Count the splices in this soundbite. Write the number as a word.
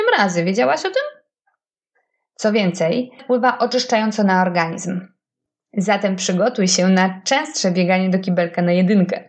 one